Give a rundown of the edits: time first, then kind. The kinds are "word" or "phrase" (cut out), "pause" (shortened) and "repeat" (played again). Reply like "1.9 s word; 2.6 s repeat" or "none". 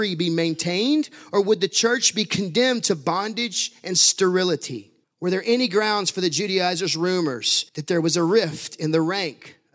5.0 s pause; 7.7 s pause